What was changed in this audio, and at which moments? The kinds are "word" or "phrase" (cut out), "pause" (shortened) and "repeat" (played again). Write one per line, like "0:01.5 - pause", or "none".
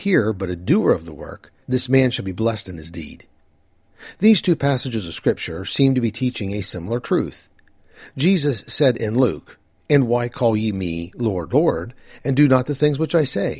0:01.6 - pause